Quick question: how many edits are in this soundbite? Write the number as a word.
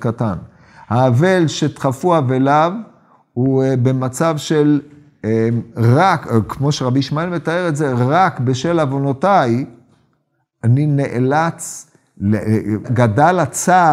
one